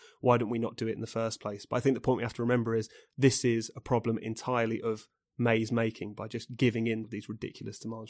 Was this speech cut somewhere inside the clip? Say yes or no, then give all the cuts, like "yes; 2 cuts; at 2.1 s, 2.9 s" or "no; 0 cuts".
yes; 1 cut; at 7.0 s